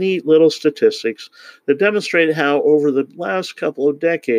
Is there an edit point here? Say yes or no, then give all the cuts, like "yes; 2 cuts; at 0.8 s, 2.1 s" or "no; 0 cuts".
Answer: no; 0 cuts